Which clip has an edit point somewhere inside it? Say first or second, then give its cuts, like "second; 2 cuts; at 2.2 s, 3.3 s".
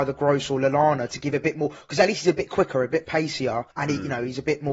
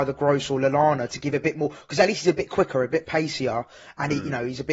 first; 1 cut; at 3.7 s